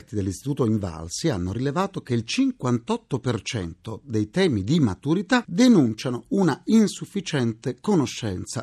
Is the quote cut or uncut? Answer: uncut